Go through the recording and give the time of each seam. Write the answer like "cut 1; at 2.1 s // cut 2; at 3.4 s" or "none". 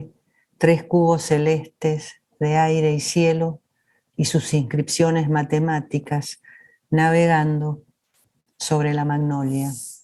none